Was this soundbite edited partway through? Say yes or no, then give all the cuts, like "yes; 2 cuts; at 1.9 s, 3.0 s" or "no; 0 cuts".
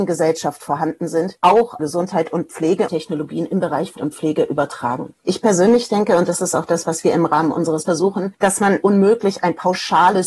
yes; 5 cuts; at 1.8 s, 2.9 s, 4.0 s, 7.8 s, 8.8 s